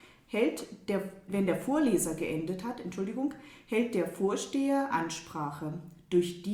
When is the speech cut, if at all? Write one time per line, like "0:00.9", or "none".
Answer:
0:01.3
0:04.9